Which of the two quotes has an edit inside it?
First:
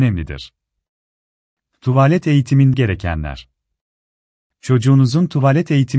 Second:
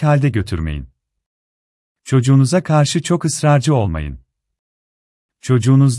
first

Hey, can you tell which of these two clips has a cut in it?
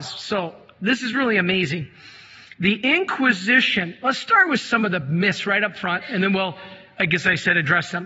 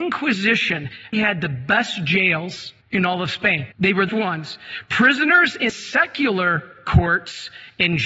second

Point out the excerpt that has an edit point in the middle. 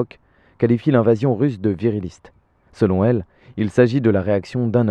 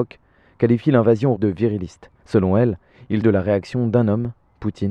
second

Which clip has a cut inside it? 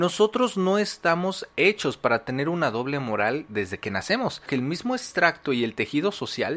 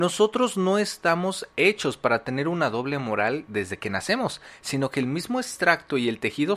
first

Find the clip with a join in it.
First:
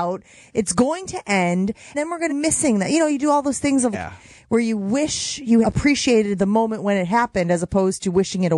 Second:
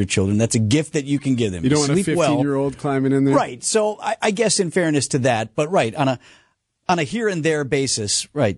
first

